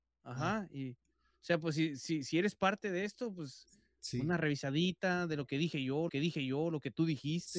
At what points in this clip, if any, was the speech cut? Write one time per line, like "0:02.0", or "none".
0:06.1